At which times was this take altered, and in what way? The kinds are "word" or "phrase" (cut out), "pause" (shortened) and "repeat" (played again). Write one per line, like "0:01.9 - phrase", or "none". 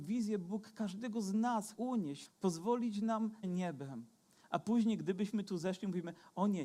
0:01.7 - word
0:02.3 - phrase
0:03.4 - phrase

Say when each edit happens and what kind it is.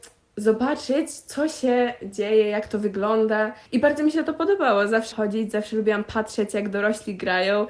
0:03.7 - pause
0:05.1 - word

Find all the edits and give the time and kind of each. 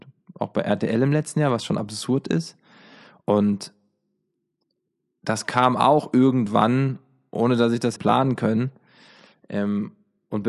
0:08.0 - word

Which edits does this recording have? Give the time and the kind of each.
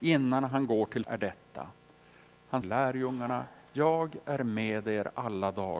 0:01.0 - word
0:02.6 - phrase

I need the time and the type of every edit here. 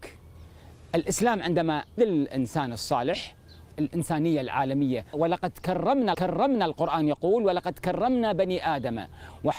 0:02.0 - word
0:03.7 - phrase
0:05.1 - phrase
0:06.1 - repeat

